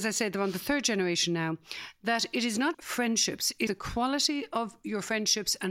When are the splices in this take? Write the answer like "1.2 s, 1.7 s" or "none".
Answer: 2.7 s, 3.7 s